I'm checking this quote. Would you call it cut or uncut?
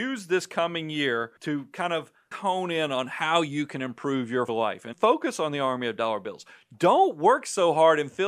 cut